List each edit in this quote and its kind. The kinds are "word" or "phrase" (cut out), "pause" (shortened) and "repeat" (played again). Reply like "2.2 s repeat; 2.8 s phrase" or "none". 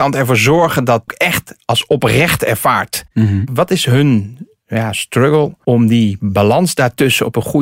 1.1 s phrase